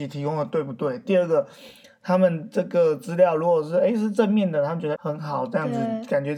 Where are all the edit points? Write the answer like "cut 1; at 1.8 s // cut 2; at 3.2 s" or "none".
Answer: cut 1; at 4.9 s